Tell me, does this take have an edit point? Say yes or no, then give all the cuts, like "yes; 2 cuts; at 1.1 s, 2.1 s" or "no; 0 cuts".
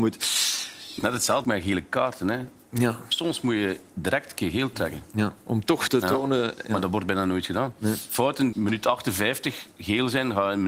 yes; 4 cuts; at 1.0 s, 1.4 s, 5.9 s, 8.5 s